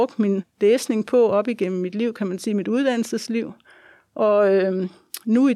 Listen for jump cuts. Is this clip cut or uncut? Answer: uncut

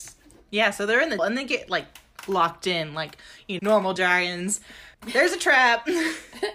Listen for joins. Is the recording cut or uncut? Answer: cut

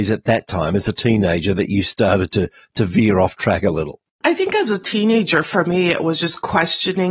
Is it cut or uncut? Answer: uncut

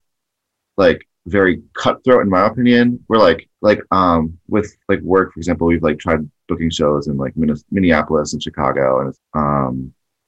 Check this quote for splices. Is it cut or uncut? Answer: cut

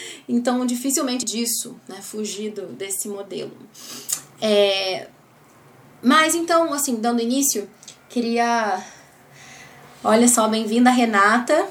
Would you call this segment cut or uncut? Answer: cut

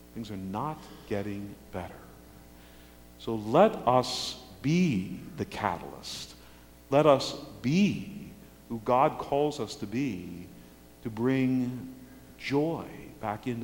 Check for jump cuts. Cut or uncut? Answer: uncut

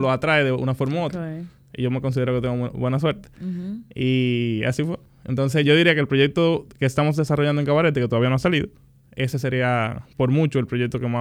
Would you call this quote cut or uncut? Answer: uncut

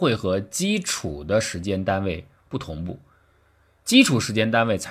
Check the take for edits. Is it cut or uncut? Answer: uncut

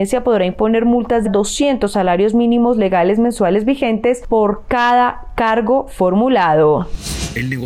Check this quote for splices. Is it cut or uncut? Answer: cut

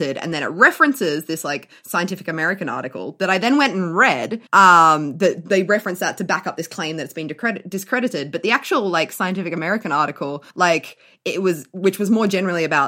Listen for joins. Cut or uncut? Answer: cut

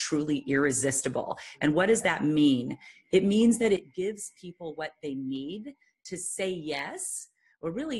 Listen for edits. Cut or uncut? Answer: uncut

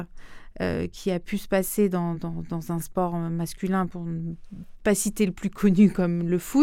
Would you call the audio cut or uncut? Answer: uncut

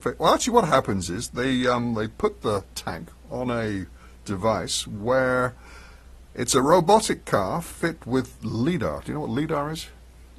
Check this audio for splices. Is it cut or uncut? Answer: uncut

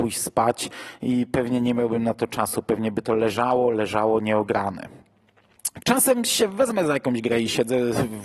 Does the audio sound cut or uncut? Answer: uncut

